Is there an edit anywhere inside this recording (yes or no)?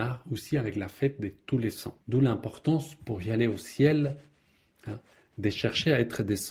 yes